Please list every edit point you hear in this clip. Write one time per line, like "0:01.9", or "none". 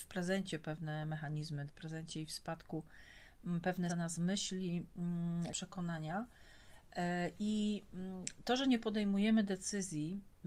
0:01.7
0:03.9
0:05.5